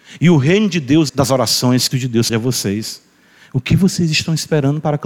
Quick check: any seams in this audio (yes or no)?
yes